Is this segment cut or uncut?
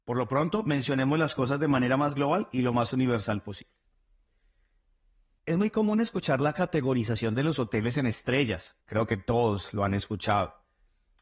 cut